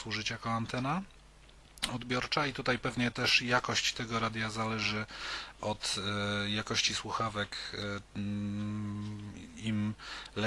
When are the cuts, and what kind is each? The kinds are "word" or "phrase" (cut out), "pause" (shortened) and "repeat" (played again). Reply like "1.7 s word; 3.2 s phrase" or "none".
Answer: 8.1 s pause

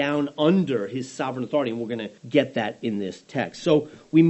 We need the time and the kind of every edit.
2.2 s pause

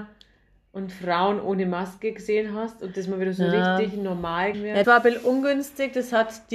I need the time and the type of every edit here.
4.5 s word; 4.8 s word

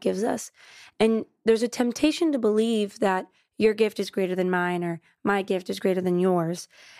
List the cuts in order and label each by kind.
none

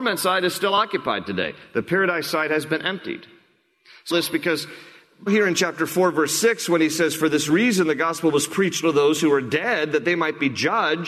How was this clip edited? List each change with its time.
4.1 s phrase; 5.3 s word; 8.8 s word

